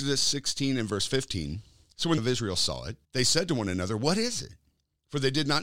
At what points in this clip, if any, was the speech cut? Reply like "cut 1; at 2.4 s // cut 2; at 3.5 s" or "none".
cut 1; at 2.2 s // cut 2; at 3.0 s